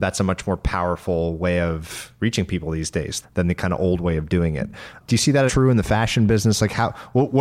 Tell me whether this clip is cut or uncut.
cut